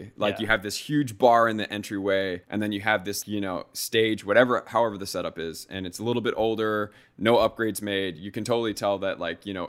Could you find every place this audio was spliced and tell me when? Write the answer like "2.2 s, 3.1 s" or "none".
2.4 s, 3.2 s